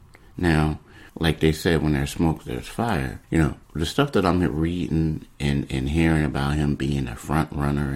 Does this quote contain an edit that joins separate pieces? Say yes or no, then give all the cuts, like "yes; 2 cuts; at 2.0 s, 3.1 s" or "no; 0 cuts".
yes; 3 cuts; at 1.1 s, 3.2 s, 3.6 s